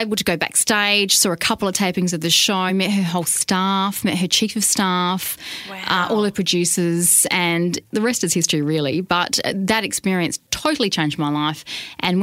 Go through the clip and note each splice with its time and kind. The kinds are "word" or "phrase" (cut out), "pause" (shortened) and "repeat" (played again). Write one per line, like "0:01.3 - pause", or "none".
none